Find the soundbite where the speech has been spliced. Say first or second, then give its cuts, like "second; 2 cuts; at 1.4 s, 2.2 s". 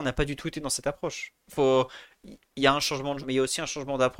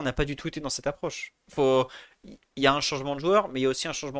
first; 1 cut; at 3.2 s